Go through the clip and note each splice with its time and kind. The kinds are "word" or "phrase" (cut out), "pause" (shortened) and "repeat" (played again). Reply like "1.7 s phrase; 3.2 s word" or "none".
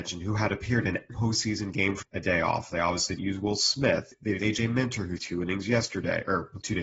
1.1 s word; 2.0 s word; 3.2 s word; 4.4 s word; 5.2 s word